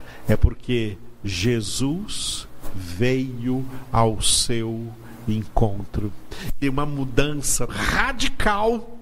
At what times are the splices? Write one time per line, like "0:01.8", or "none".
0:06.6
0:07.7

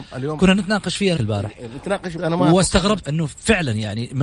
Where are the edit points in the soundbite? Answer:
0:01.2
0:02.2
0:03.0

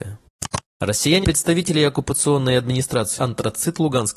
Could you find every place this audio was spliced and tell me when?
0:01.2
0:03.2

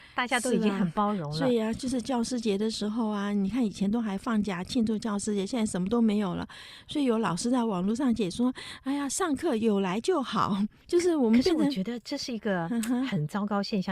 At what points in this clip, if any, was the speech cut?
0:10.8

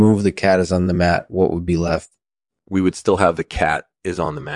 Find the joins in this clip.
none

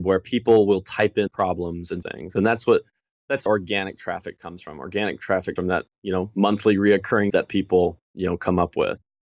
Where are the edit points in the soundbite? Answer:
0:01.3
0:02.0
0:03.5
0:05.6
0:07.3
0:08.0

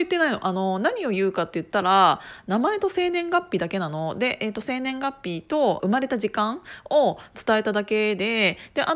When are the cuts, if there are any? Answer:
0:05.8

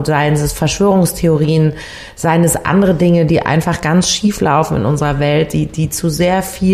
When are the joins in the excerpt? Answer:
none

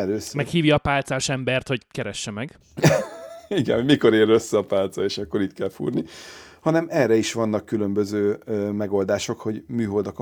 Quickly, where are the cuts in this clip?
none

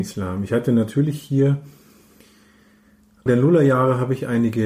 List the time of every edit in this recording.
0:03.3

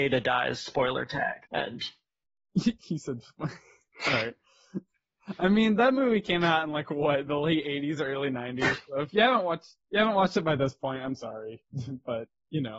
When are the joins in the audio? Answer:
0:01.5
0:09.8

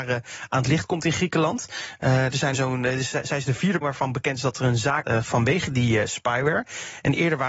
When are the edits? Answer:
0:02.5
0:03.8
0:05.0

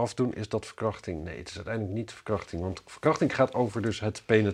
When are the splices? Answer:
none

